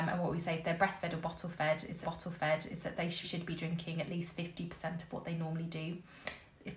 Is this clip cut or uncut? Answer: cut